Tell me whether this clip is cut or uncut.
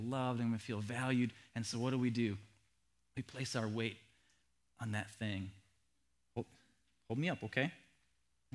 uncut